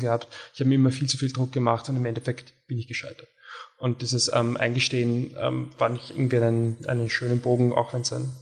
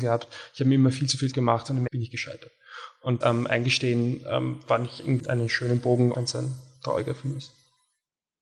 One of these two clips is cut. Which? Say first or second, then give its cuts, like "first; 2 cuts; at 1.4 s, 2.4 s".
second; 5 cuts; at 1.3 s, 1.9 s, 3.2 s, 5.2 s, 6.1 s